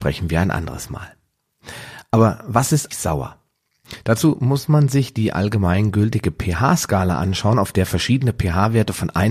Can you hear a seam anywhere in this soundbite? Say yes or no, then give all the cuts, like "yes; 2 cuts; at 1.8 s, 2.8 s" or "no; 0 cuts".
yes; 1 cut; at 2.9 s